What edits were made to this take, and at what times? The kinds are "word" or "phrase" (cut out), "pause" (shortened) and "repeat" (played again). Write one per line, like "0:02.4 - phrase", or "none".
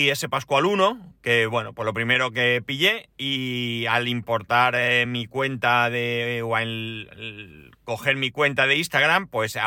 none